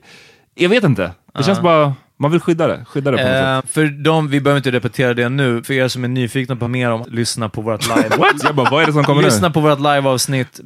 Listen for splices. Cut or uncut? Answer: cut